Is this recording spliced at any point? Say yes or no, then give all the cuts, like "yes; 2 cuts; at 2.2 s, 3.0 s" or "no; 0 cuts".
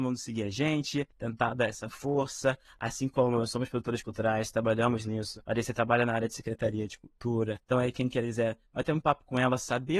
yes; 3 cuts; at 1.1 s, 5.4 s, 7.6 s